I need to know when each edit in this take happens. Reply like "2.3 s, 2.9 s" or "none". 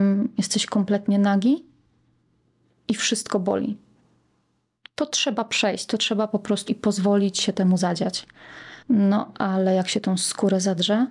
6.7 s, 8.8 s